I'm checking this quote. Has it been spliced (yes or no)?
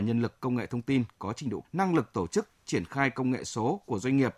yes